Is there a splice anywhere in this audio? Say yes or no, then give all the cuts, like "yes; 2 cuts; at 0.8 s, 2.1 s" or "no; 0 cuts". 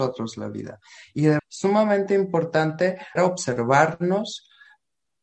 yes; 2 cuts; at 1.4 s, 3.2 s